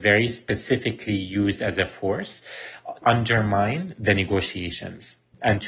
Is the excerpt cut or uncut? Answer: cut